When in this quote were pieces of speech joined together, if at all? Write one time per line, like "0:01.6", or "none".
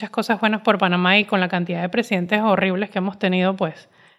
none